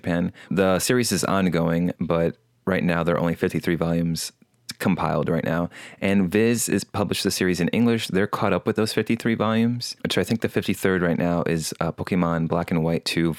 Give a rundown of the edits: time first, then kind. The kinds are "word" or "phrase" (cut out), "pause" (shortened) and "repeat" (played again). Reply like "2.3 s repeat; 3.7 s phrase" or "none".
2.0 s pause